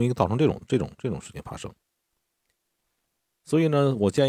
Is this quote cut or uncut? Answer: uncut